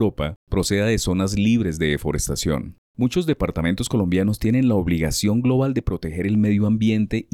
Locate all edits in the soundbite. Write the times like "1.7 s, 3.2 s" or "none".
2.8 s